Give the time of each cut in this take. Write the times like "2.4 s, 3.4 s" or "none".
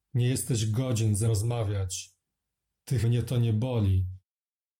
1.3 s, 3.0 s